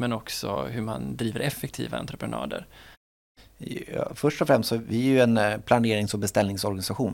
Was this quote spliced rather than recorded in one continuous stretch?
no; 0 cuts

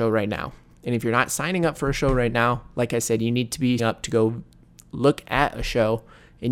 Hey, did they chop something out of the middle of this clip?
yes; 1 cut; at 3.8 s

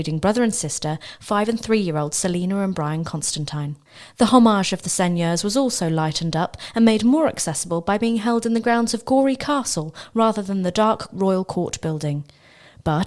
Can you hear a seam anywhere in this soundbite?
no; 0 cuts

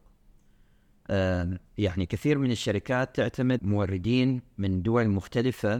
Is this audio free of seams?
no; 2 cuts; at 1.7 s, 3.6 s

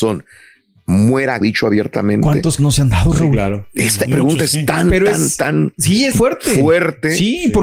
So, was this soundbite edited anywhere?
yes; 4 cuts; at 1.4 s, 2.6 s, 4.1 s, 6.1 s

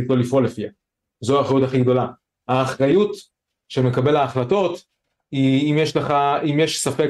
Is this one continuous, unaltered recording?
yes; 0 cuts

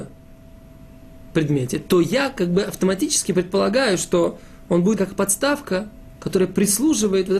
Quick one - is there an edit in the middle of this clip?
yes; 1 cut; at 5.0 s

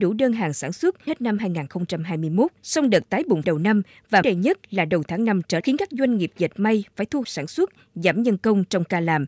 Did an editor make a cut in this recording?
yes; 6 cuts; at 1.1 s, 2.6 s, 3.4 s, 4.2 s, 5.6 s, 7.2 s

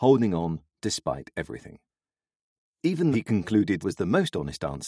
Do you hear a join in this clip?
yes; 2 cuts; at 3.1 s, 3.8 s

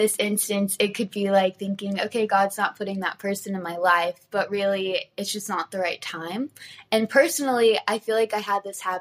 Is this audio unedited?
yes; 0 cuts

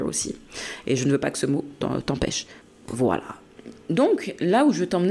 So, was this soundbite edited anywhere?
yes; 1 cut; at 2.6 s

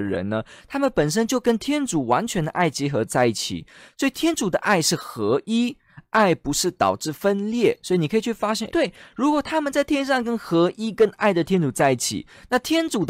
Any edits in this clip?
yes; 1 cut; at 8.7 s

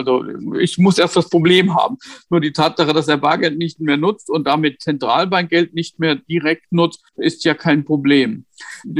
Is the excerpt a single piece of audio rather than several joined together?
no; 1 cut; at 7.1 s

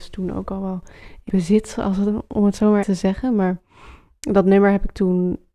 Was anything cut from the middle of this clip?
yes; 2 cuts; at 1.3 s, 2.8 s

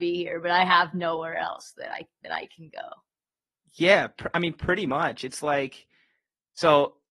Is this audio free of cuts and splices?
yes; 0 cuts

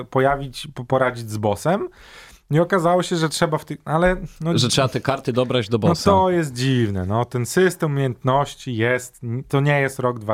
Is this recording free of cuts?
yes; 0 cuts

